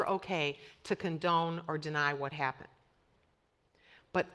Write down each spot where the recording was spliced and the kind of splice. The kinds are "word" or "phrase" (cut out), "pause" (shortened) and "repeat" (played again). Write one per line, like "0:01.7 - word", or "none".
none